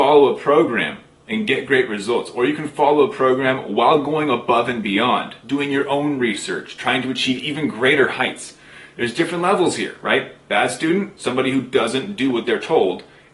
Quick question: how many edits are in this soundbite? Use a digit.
0